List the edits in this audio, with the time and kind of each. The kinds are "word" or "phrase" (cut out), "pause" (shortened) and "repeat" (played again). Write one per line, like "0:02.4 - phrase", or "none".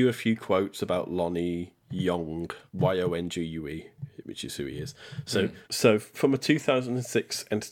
0:02.7 - pause
0:05.6 - pause